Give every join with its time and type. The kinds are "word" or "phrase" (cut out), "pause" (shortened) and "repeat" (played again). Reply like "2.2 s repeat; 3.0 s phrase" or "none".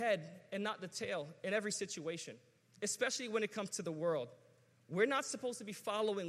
none

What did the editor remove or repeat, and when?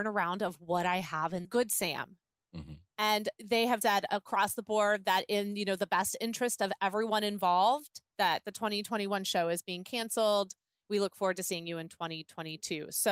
1.4 s phrase; 3.8 s word; 8.1 s pause

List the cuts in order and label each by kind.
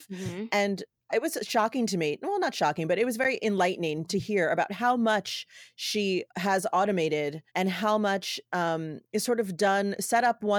6.3 s pause; 7.5 s pause; 9.0 s pause

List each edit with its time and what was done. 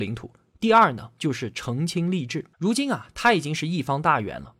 2.5 s pause

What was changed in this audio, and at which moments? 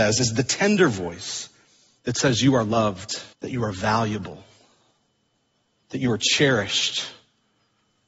3.3 s pause

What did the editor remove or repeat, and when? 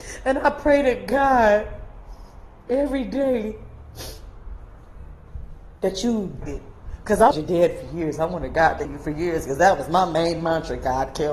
6.4 s phrase; 7.3 s word; 8.8 s word

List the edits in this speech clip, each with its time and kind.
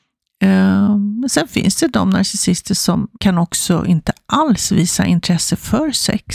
3.1 s pause

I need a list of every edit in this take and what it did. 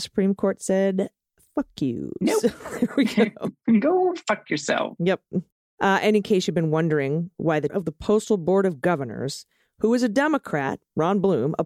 7.7 s word

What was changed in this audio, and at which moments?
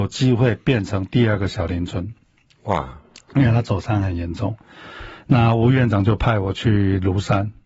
none

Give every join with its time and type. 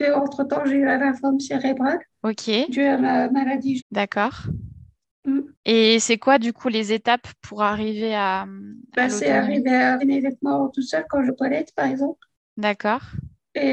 2.1 s pause; 3.8 s word; 10.0 s word; 11.3 s word

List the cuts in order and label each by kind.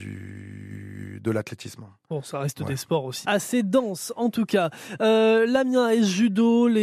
3.2 s word

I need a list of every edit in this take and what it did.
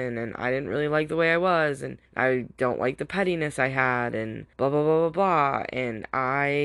2.1 s pause; 4.5 s pause

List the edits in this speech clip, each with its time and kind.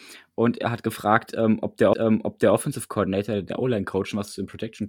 1.9 s repeat

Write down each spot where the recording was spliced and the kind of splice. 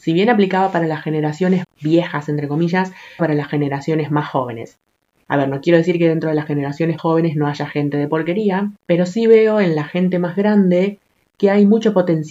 1.6 s word; 3.2 s phrase; 7.0 s word; 8.8 s pause

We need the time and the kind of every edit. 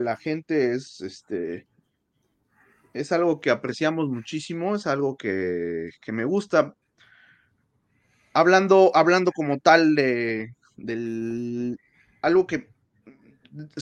none

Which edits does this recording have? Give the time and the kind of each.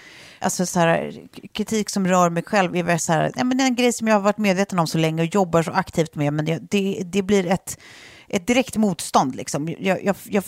none

